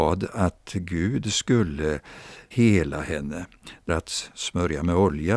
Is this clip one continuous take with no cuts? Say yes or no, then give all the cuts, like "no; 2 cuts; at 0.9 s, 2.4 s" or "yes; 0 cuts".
no; 2 cuts; at 2.5 s, 3.9 s